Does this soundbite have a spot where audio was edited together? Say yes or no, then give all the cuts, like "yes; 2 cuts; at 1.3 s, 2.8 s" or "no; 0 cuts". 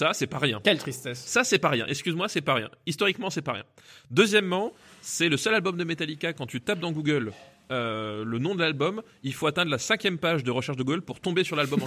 no; 0 cuts